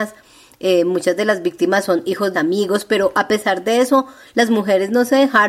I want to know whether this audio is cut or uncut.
cut